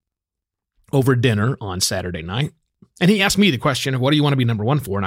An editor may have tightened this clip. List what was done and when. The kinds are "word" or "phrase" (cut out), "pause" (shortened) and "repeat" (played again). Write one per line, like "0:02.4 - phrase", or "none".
none